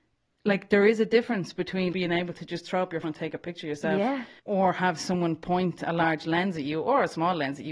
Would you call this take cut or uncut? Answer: cut